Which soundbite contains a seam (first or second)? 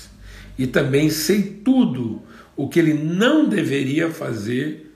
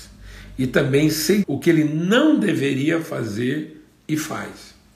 second